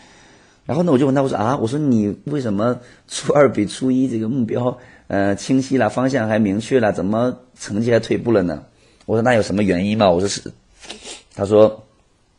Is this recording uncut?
yes; 0 cuts

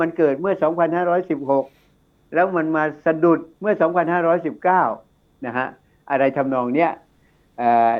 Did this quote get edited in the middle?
yes; 1 cut; at 3.5 s

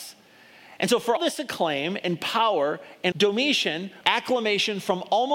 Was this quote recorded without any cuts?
no; 3 cuts; at 1.2 s, 3.1 s, 4.0 s

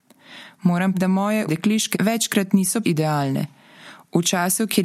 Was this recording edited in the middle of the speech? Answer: yes; 4 cuts; at 0.9 s, 1.5 s, 1.9 s, 2.8 s

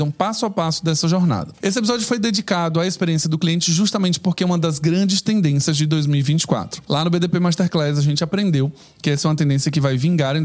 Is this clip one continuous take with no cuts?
yes; 0 cuts

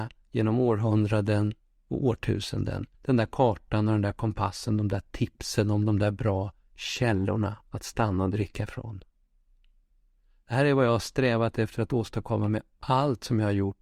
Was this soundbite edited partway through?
yes; 1 cut; at 2.9 s

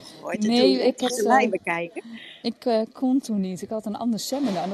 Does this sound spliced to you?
yes; 1 cut; at 1.1 s

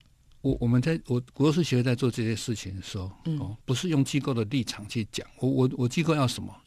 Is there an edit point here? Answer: yes; 1 cut; at 3.6 s

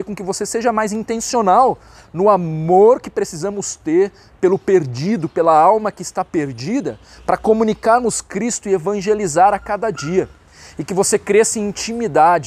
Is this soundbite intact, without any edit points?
yes; 0 cuts

